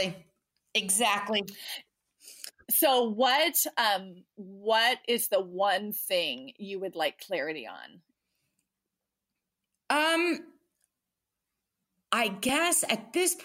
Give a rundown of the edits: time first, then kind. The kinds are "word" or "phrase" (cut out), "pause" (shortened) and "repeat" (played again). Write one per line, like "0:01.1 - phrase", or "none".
none